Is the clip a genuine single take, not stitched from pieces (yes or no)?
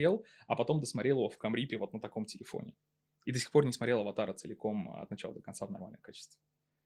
yes